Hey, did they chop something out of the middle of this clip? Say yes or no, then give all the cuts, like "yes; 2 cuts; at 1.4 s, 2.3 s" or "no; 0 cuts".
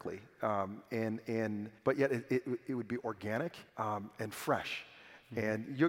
yes; 2 cuts; at 1.8 s, 3.7 s